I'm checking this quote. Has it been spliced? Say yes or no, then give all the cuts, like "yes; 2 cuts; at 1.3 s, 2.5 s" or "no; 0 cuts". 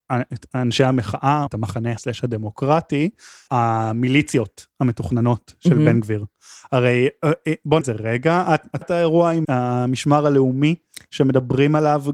yes; 6 cuts; at 1.5 s, 2.0 s, 3.5 s, 7.8 s, 8.8 s, 9.4 s